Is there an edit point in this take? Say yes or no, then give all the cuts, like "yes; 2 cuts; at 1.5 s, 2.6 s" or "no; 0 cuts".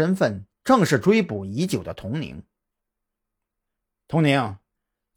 no; 0 cuts